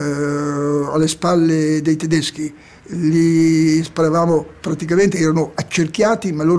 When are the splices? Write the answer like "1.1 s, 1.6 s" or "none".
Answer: none